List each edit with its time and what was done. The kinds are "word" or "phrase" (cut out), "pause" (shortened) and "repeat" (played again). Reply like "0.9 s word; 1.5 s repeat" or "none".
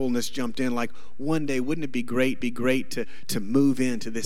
2.4 s repeat

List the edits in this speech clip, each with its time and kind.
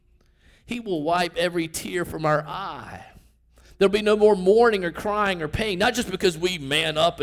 none

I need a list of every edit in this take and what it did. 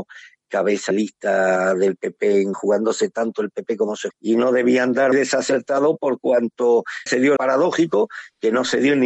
0.9 s word; 2.5 s word; 4.1 s phrase; 5.1 s word; 7.1 s phrase; 7.4 s phrase

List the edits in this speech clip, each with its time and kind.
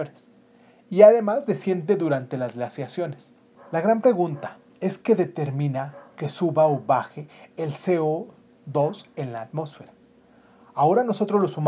none

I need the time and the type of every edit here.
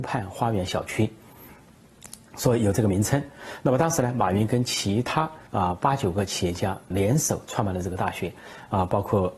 5.5 s pause; 6.9 s word

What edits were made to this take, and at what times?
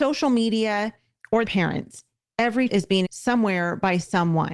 1.4 s word; 2.7 s word; 3.0 s word

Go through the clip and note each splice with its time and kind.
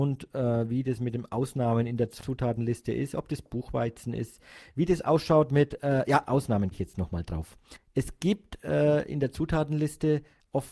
6.2 s word; 6.7 s phrase

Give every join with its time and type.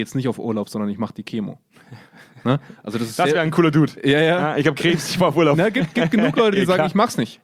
none

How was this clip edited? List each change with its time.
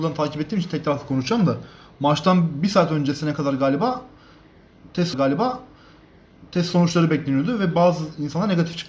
5.1 s repeat

